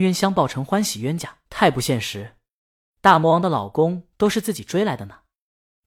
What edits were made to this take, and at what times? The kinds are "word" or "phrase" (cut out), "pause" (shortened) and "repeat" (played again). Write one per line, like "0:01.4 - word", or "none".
0:01.4 - pause
0:04.1 - pause